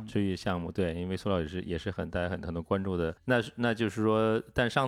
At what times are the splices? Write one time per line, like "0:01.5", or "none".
0:03.2

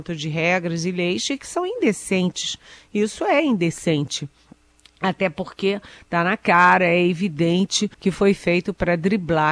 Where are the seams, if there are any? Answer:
0:07.9

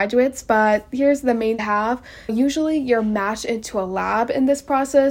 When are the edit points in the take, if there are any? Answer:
0:01.6
0:02.3

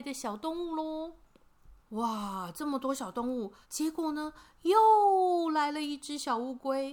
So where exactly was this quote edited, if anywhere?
0:01.8
0:03.6

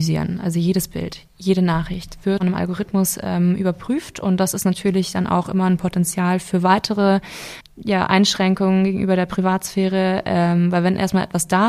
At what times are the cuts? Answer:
0:02.4

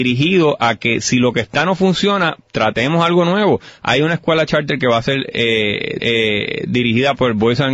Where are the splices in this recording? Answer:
0:06.0

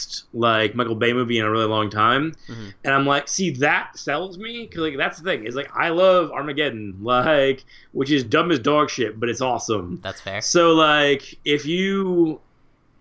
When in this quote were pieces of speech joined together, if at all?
none

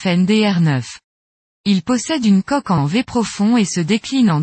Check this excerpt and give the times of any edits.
0:02.8

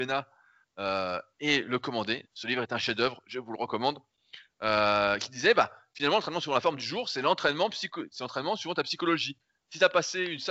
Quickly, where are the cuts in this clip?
none

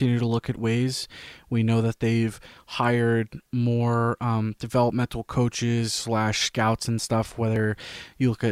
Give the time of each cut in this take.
none

